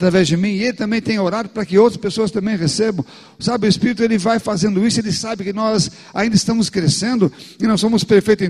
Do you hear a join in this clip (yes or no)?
no